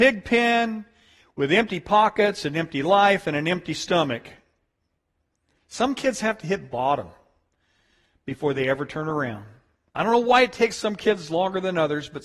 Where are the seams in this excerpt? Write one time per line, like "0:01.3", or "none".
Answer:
none